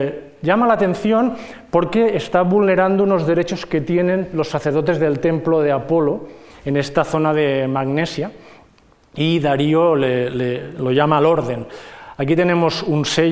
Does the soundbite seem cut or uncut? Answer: uncut